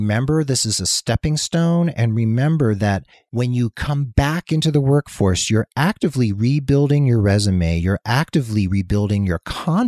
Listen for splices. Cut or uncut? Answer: cut